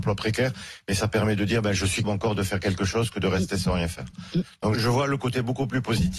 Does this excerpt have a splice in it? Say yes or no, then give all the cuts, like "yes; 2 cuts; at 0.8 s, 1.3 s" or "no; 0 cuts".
yes; 2 cuts; at 2.0 s, 4.7 s